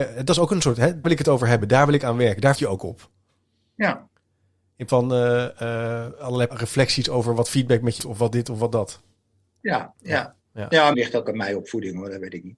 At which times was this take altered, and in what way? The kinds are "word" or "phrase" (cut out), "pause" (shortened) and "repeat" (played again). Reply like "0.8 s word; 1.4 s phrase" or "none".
1.0 s word; 2.5 s word; 4.9 s word; 6.5 s word; 8.0 s word; 10.9 s word; 11.2 s word